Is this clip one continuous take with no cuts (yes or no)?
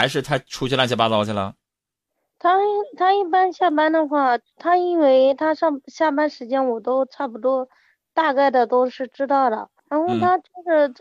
no